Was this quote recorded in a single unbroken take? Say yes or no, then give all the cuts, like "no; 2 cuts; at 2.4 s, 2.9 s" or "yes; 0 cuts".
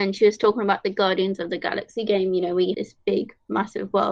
no; 1 cut; at 2.7 s